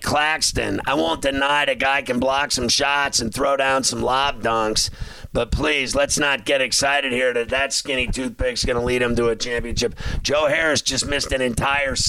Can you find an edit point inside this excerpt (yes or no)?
no